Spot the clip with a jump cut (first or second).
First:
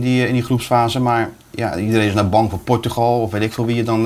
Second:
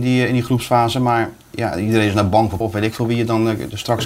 second